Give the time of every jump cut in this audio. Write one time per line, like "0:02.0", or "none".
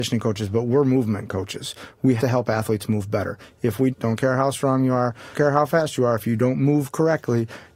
0:02.2
0:03.9
0:05.3